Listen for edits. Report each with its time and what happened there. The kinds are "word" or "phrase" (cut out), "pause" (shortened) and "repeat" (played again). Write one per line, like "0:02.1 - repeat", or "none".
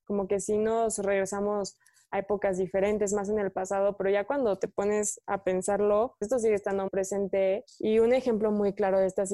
0:06.2 - word
0:06.9 - word